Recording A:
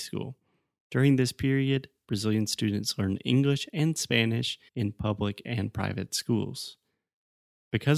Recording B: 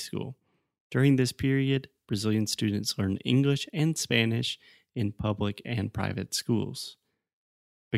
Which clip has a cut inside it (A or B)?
A